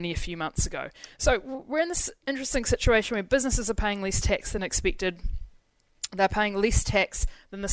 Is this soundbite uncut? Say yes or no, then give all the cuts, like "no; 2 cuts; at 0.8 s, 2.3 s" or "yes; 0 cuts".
yes; 0 cuts